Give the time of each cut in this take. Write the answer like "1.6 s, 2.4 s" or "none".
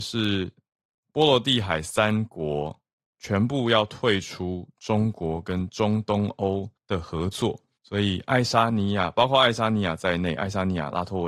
6.8 s, 7.8 s